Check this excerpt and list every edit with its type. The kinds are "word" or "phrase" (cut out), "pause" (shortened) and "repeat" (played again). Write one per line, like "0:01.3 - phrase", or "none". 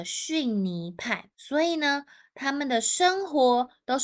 0:01.3 - pause